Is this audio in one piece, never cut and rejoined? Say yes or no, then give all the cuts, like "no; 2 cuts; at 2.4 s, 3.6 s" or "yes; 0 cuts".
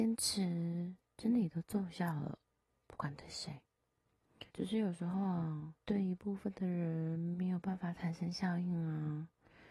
no; 2 cuts; at 4.5 s, 5.8 s